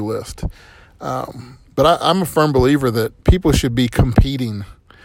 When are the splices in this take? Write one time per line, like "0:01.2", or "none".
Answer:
0:03.2